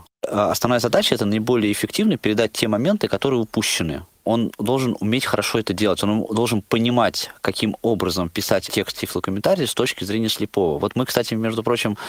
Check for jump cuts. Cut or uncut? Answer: uncut